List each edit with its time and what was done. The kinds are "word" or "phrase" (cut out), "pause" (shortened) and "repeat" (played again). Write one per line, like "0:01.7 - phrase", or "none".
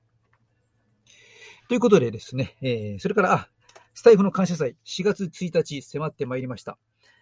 none